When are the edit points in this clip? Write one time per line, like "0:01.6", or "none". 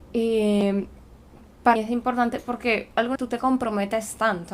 0:01.8
0:03.2